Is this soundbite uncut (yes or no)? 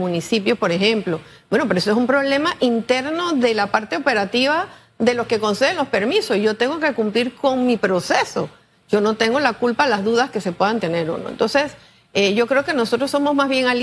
yes